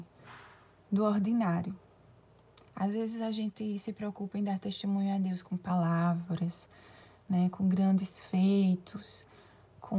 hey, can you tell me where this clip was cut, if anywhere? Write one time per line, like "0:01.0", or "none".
none